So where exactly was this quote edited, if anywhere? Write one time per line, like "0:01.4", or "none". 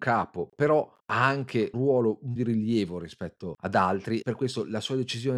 0:01.0
0:01.7
0:02.4
0:04.2